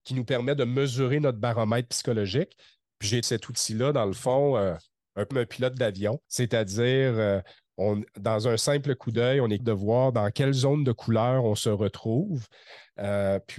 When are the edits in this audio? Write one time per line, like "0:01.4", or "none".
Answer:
0:03.2
0:05.3
0:06.2
0:09.6